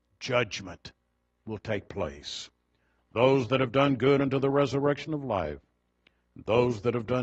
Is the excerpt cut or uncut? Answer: uncut